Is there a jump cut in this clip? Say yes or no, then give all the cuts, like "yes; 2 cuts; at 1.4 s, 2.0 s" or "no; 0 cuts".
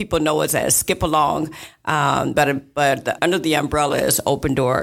yes; 1 cut; at 3.2 s